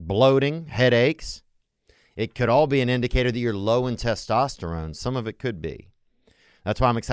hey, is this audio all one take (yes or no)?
yes